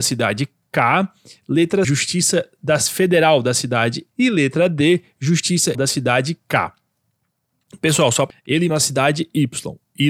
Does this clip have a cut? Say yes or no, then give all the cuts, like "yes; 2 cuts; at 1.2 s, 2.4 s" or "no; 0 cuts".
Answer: yes; 5 cuts; at 1.8 s, 4.1 s, 5.7 s, 8.3 s, 8.7 s